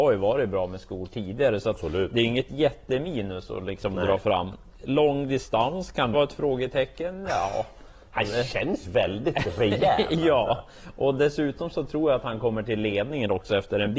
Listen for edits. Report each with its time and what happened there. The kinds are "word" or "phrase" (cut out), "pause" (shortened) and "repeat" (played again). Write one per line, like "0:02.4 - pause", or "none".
0:06.1 - word
0:08.8 - word

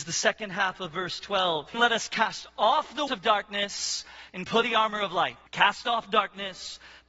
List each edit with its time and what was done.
0:01.7 - phrase
0:03.1 - word
0:04.6 - word
0:05.5 - pause

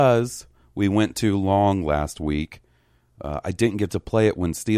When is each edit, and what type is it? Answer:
none

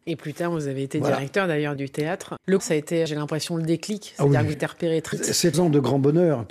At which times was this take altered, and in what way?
0:01.8 - word
0:02.6 - word
0:03.1 - word
0:04.5 - word
0:05.1 - word
0:05.5 - word

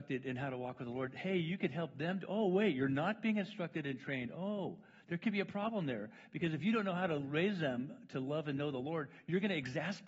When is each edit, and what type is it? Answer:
none

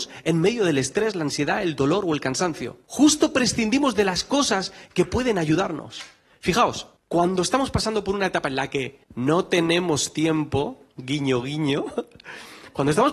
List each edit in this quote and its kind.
0:02.8 - pause
0:07.0 - pause
0:09.0 - pause

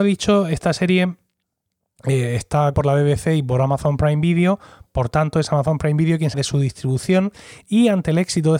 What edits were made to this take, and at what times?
0:02.7 - word
0:06.3 - word

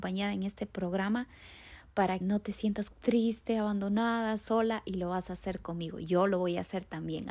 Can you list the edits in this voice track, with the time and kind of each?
0:02.2 - word
0:02.9 - word

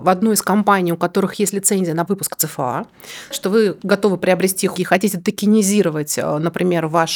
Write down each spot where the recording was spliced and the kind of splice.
0:02.1 - word
0:03.3 - word
0:04.8 - word

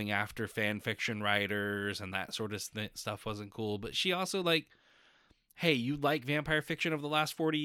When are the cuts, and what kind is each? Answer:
none

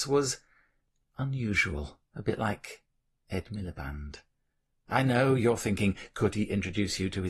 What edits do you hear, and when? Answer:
0:02.1 - pause

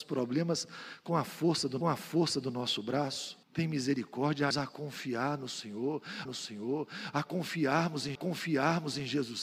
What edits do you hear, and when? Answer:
0:01.8 - repeat
0:03.4 - pause
0:04.5 - word
0:06.2 - repeat
0:08.1 - repeat

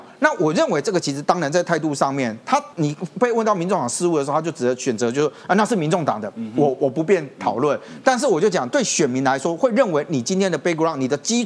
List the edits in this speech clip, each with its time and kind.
0:02.7 - pause

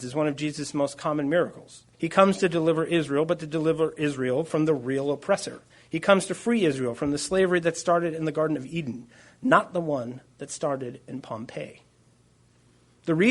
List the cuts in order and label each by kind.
0:01.9 - pause
0:05.7 - pause

